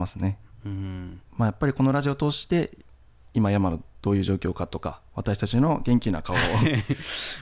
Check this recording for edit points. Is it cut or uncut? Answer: cut